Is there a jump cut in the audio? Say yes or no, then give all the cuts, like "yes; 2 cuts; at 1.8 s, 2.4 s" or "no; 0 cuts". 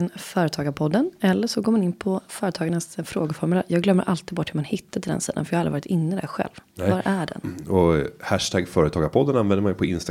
no; 0 cuts